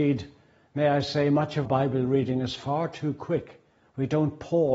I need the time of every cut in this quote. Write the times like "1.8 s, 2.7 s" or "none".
1.7 s